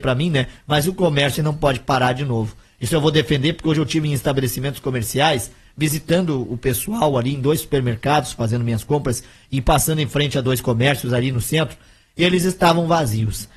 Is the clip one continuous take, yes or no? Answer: yes